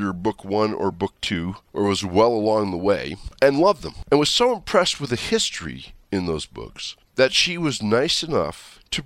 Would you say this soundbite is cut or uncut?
uncut